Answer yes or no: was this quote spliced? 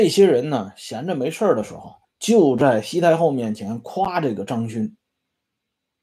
yes